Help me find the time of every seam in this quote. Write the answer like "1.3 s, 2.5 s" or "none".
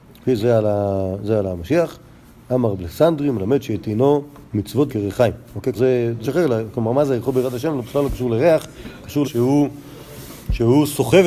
4.9 s, 5.7 s, 6.2 s, 9.2 s